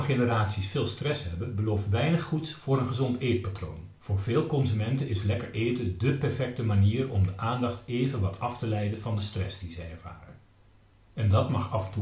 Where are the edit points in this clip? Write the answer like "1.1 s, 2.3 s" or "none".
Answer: 4.0 s